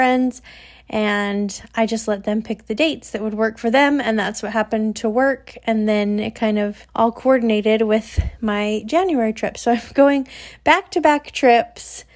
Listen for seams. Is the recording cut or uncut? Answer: cut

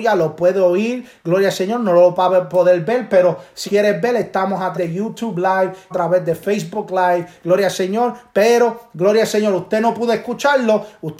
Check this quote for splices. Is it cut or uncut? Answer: cut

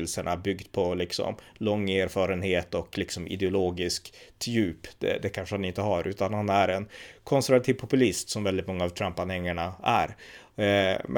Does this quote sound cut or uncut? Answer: uncut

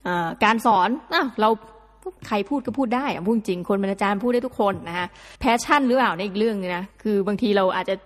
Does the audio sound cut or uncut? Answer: cut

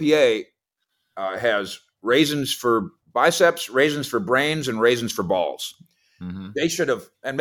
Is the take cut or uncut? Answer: uncut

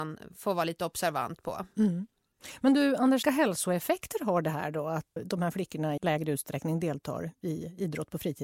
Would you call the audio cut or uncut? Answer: cut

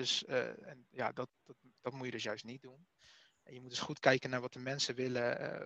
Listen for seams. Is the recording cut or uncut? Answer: uncut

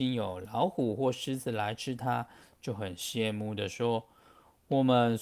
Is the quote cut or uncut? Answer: uncut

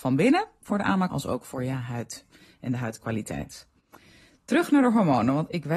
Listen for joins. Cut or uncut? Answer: cut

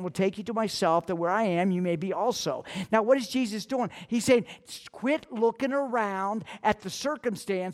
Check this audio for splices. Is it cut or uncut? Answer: uncut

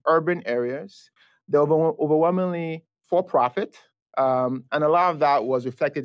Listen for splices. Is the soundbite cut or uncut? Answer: uncut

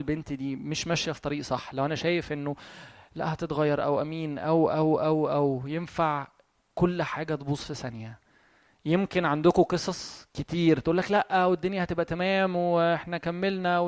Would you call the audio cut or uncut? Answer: uncut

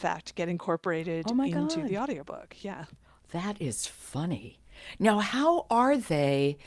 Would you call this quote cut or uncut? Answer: uncut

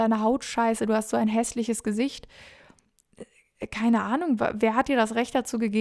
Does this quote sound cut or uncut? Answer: uncut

